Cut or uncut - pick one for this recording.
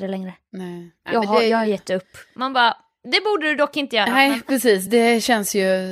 uncut